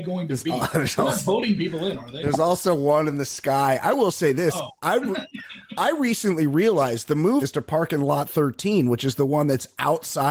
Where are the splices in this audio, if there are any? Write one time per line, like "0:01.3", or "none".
0:07.4